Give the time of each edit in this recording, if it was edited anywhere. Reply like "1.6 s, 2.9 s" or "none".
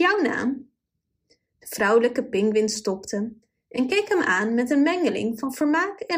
none